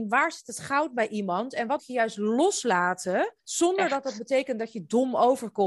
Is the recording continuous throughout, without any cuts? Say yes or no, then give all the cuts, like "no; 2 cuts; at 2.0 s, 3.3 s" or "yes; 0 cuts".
no; 2 cuts; at 1.8 s, 3.4 s